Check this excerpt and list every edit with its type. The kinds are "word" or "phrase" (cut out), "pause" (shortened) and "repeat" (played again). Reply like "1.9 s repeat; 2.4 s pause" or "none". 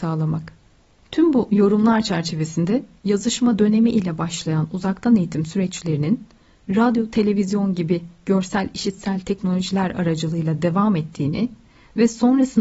none

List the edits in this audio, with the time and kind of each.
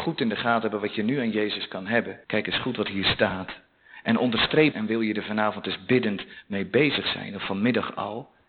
2.2 s pause; 4.7 s word

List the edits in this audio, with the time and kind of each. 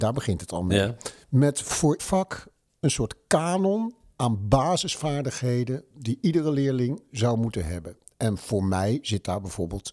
2.0 s word

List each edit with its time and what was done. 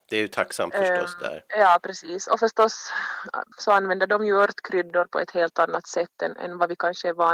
1.5 s pause; 3.5 s pause

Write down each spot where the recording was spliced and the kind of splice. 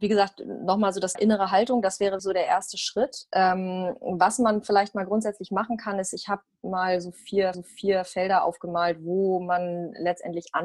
1.2 s word; 2.2 s word; 7.5 s repeat

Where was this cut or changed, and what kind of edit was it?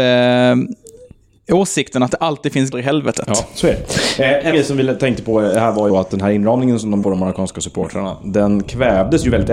2.7 s word; 4.5 s word; 5.9 s word; 7.0 s word

